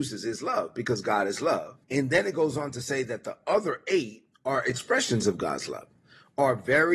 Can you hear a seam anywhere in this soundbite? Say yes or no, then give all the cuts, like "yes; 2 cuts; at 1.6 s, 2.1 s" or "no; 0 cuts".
yes; 2 cuts; at 1.8 s, 4.3 s